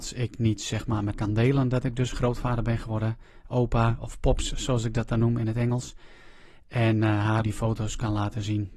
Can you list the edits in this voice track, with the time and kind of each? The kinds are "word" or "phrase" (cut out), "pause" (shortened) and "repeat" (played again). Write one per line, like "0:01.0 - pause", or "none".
0:01.1 - word
0:07.4 - word

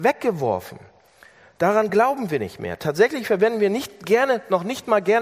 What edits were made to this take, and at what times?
none

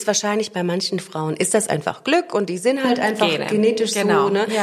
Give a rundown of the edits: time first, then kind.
none

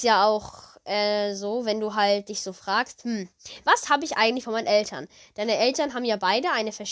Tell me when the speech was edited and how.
none

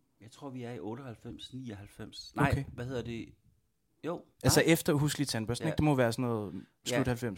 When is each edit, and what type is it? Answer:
0:04.3 - pause

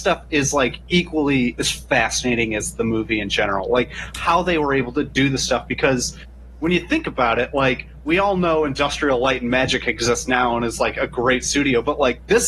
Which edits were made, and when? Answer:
none

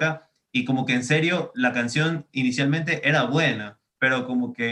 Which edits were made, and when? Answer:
none

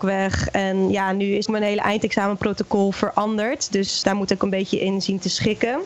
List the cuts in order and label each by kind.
0:01.5 - word
0:04.0 - word
0:04.4 - word

